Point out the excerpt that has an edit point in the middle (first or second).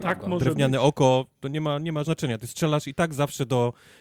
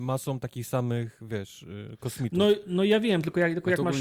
first